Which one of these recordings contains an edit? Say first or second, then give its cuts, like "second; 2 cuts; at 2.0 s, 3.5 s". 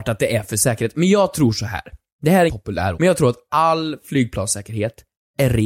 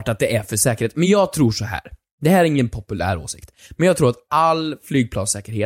first; 2 cuts; at 2.5 s, 2.9 s